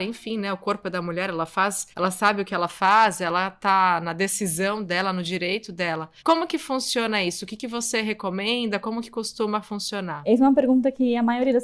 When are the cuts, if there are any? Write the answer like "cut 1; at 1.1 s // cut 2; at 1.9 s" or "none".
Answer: cut 1; at 1.9 s // cut 2; at 6.2 s